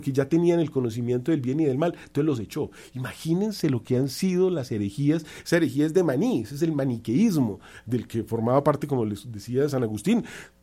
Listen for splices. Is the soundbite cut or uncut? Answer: uncut